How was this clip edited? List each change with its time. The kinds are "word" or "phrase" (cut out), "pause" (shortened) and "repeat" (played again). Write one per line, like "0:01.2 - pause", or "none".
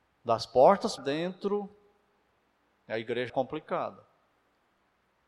0:01.0 - word
0:03.3 - word

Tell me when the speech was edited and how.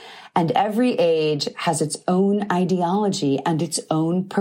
none

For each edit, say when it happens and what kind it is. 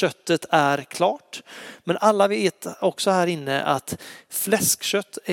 none

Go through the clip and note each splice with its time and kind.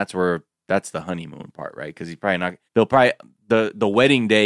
0:02.7 - pause

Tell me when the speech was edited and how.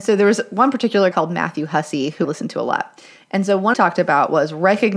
0:01.1 - word
0:02.2 - word
0:03.7 - phrase

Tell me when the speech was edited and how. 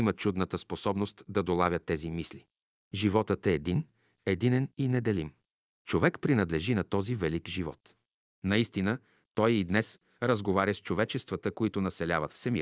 none

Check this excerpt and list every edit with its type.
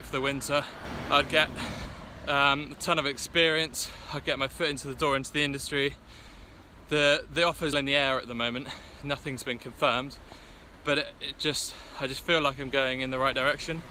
0:07.7 - word

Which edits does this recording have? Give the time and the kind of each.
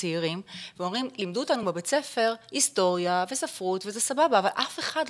none

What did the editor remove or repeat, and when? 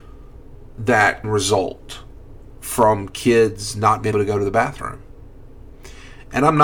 0:01.2 - word
0:04.1 - word

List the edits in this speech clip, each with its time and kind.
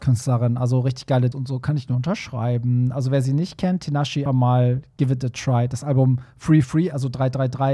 0:01.3 - word
0:04.3 - word
0:06.6 - word

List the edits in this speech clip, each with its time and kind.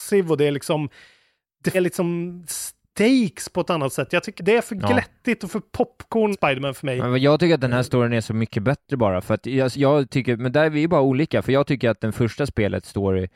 0:01.7 - word
0:04.4 - word
0:06.3 - word
0:09.7 - word

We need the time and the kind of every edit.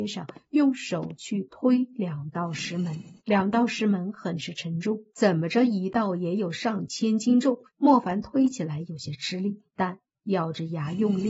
0:03.2 - pause
0:05.1 - pause
0:07.7 - pause
0:09.7 - pause

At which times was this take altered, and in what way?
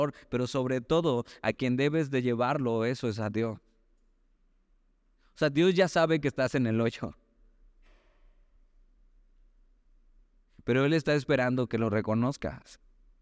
none

